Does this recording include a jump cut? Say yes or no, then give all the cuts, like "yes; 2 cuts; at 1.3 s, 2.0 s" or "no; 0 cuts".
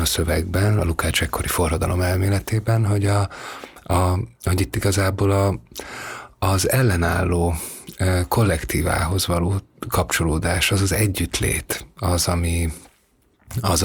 no; 0 cuts